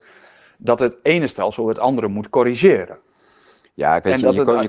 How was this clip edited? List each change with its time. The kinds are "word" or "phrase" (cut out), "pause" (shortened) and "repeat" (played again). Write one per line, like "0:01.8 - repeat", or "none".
none